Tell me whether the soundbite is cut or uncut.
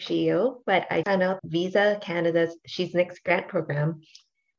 cut